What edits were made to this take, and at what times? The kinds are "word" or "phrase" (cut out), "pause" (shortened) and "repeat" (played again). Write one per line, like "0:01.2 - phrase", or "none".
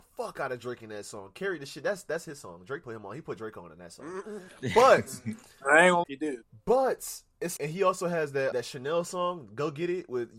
0:02.8 - word
0:06.0 - word
0:07.6 - word
0:08.5 - word